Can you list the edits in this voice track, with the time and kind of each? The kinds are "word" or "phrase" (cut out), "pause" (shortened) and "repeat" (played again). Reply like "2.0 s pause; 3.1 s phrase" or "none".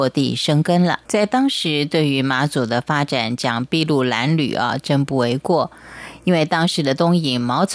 1.0 s pause